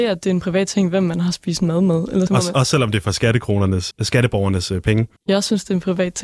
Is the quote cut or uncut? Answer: cut